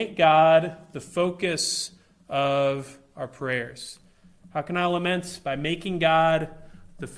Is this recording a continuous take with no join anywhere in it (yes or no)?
yes